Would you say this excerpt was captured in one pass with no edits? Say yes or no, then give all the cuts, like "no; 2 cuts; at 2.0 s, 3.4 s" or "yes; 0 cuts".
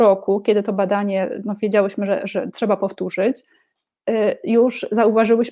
yes; 0 cuts